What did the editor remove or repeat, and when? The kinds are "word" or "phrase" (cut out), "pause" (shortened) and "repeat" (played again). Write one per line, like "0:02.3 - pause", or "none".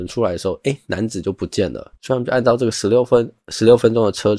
0:01.9 - pause